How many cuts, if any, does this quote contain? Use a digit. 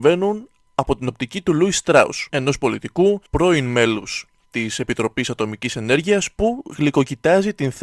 2